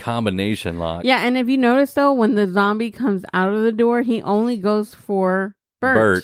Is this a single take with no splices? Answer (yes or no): yes